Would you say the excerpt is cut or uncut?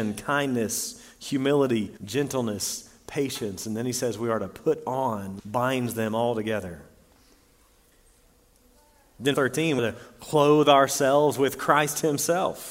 cut